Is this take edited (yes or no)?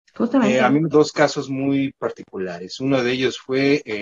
yes